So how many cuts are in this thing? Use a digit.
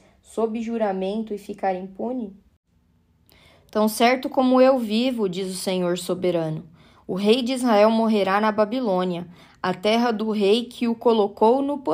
0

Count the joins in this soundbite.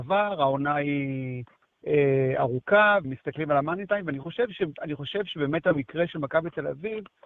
1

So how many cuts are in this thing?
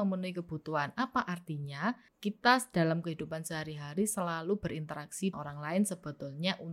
2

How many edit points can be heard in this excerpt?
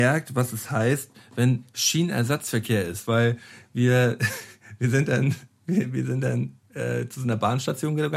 0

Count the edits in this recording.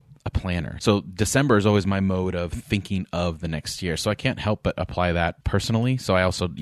1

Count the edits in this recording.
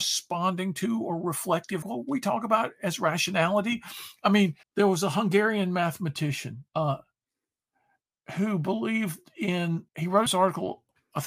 5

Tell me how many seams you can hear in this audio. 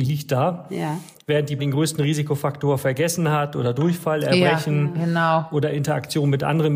1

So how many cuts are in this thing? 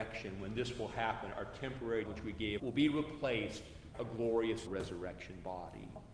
4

